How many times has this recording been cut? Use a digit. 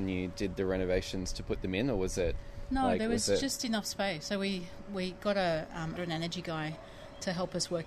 1